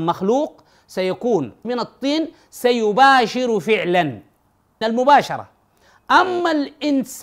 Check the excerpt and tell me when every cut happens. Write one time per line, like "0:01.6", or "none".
0:01.6
0:04.8